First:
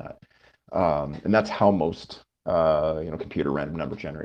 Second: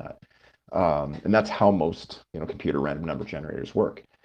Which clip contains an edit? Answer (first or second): second